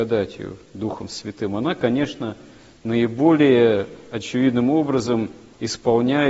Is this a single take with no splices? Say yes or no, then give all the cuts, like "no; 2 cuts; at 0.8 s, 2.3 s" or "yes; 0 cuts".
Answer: yes; 0 cuts